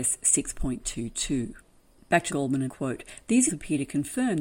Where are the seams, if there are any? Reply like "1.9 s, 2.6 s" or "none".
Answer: 2.3 s, 2.7 s, 3.5 s